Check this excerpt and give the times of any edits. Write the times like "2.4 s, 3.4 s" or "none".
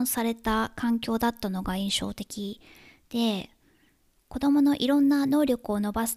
none

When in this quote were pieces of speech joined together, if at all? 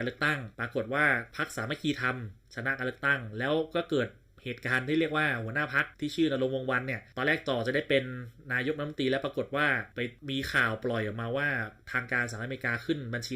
5.9 s

